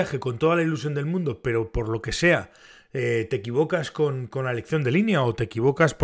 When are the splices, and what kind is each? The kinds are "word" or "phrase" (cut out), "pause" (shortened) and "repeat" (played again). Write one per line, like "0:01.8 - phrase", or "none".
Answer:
none